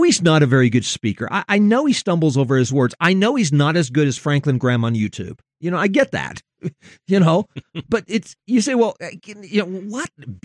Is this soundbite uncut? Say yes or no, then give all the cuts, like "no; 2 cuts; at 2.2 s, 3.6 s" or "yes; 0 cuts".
yes; 0 cuts